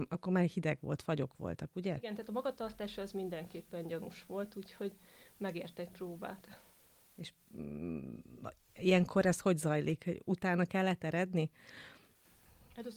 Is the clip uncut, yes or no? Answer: yes